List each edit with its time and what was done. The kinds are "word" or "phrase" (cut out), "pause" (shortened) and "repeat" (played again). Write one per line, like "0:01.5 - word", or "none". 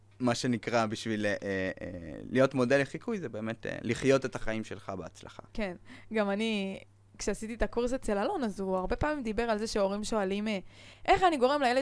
0:05.5 - pause